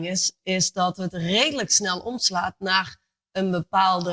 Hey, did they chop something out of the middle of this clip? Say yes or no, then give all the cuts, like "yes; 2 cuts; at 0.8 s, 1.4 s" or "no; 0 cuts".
no; 0 cuts